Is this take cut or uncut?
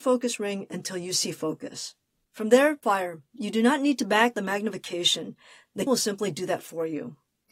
cut